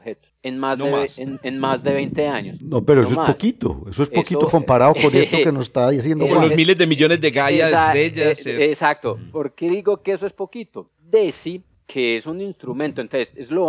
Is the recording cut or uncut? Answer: uncut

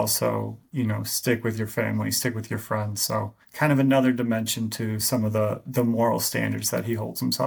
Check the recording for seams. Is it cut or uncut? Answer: cut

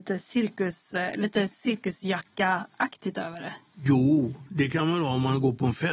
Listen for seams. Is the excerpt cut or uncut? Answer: uncut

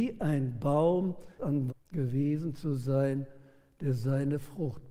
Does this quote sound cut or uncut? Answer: cut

